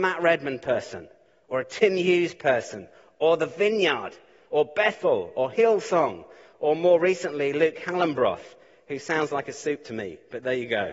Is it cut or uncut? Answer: uncut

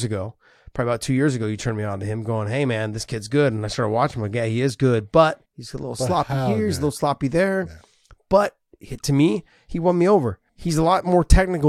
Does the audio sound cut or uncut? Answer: cut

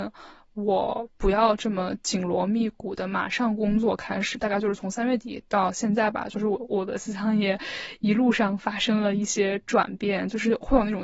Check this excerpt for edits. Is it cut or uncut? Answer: cut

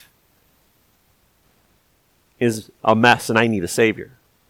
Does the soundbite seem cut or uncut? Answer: uncut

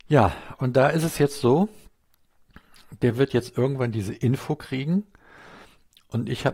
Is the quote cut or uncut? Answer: uncut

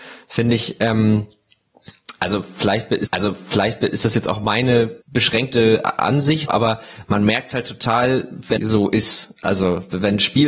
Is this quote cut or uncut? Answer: cut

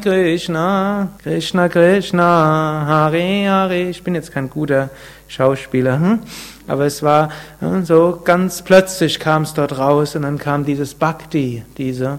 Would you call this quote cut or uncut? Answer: cut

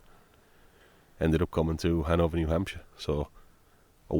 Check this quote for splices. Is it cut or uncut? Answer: uncut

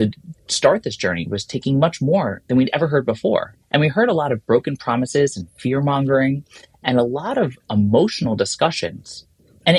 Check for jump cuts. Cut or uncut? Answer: cut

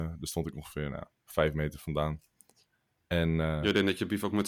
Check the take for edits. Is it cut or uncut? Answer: uncut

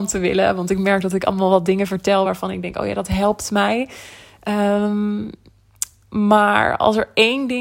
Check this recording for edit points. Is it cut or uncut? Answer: uncut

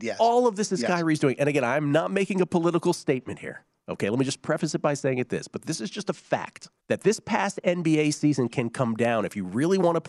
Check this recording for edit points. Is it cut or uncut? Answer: cut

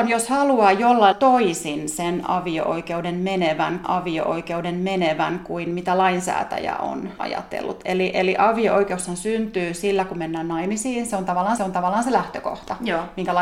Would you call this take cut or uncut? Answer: cut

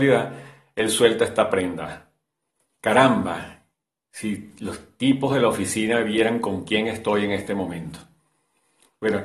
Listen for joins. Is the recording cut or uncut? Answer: uncut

